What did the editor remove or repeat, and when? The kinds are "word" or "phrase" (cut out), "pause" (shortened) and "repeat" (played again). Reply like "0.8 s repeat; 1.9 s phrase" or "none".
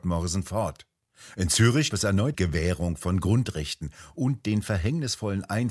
1.9 s word; 2.3 s phrase